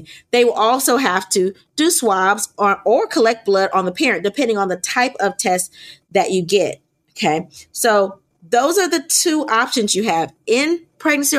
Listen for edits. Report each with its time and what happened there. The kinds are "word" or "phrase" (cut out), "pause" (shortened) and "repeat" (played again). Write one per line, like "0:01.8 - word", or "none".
none